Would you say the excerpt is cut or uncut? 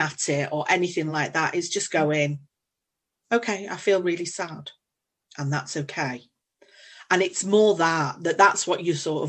uncut